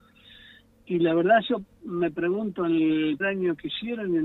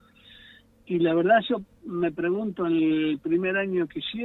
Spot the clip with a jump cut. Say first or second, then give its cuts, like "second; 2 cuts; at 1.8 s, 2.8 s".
first; 1 cut; at 3.2 s